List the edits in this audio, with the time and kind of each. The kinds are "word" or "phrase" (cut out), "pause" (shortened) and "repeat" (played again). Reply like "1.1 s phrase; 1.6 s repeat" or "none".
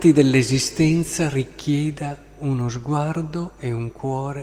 none